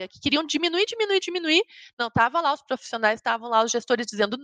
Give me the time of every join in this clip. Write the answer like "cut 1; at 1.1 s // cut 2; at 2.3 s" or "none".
none